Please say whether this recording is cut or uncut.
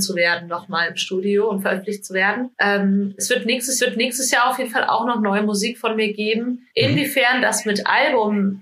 cut